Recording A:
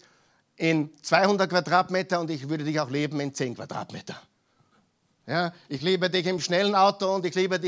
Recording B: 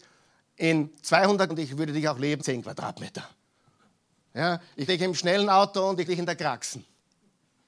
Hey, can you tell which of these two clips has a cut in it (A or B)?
B